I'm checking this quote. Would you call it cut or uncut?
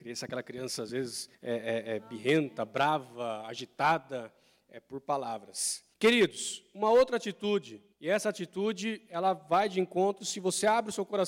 cut